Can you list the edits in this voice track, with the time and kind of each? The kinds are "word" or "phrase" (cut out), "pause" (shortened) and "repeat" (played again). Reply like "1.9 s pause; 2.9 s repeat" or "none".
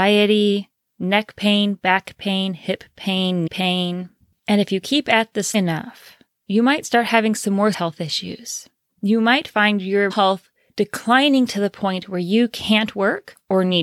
3.5 s word; 5.5 s word; 7.7 s word; 10.1 s word